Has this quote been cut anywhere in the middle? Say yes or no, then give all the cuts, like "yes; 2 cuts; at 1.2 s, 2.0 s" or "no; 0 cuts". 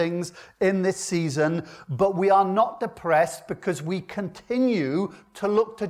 no; 0 cuts